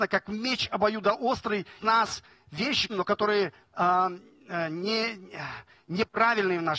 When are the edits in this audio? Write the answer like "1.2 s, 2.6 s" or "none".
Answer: 1.8 s, 2.9 s